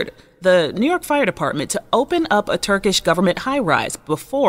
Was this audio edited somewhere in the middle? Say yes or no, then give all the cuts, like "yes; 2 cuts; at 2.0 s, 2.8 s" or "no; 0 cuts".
no; 0 cuts